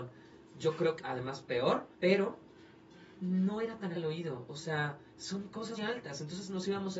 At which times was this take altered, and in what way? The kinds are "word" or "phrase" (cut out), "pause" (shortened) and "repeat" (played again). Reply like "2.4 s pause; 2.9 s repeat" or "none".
1.0 s word; 1.9 s pause; 3.9 s word; 5.1 s pause; 5.8 s word